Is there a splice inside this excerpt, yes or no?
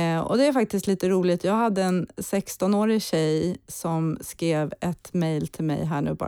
no